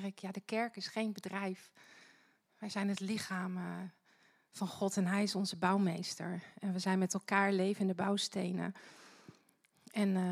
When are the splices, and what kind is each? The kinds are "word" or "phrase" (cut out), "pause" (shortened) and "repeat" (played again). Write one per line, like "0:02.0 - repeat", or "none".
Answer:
none